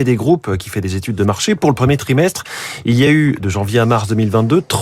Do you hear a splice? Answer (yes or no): no